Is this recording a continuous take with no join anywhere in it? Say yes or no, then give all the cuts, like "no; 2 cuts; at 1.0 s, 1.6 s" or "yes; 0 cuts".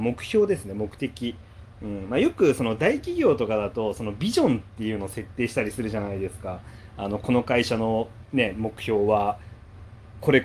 yes; 0 cuts